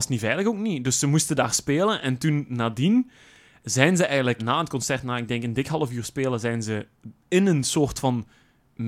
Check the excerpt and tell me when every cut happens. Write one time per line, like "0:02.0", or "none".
0:04.4